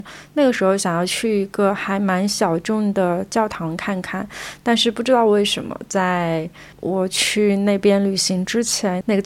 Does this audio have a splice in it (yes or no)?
yes